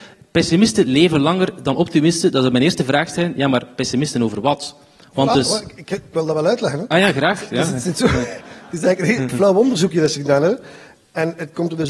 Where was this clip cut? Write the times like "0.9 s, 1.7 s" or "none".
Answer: none